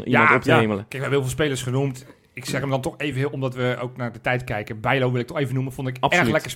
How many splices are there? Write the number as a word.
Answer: zero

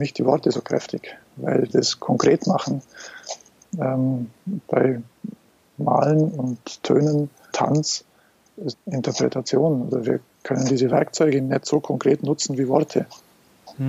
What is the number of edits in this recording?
three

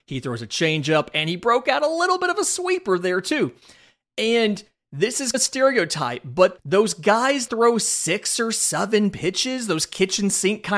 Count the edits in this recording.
one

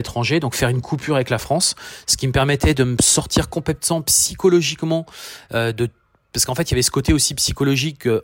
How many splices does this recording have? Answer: zero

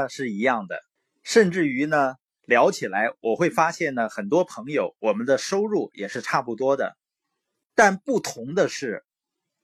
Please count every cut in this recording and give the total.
one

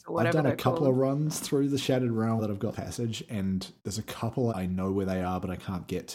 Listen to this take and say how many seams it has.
four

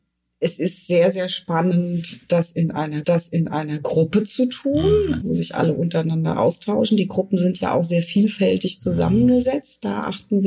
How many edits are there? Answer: two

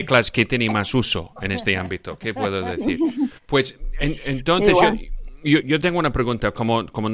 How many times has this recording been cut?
two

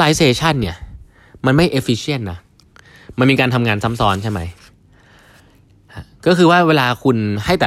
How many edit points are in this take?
zero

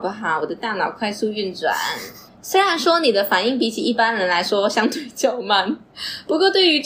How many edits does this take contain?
one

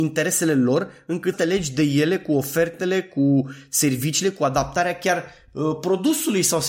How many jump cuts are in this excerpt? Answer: one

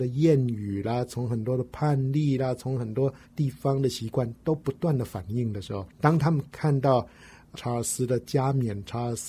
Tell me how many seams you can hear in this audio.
three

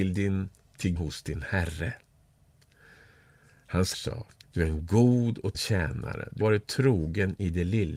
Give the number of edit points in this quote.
five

